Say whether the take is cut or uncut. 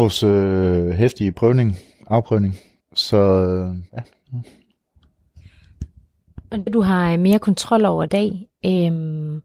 cut